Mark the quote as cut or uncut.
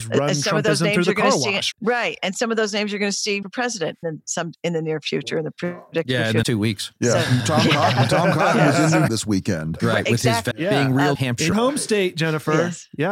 cut